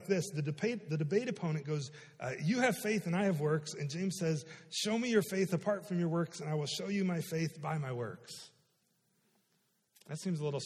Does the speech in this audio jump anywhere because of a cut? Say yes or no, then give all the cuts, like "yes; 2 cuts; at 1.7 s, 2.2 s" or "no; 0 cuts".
no; 0 cuts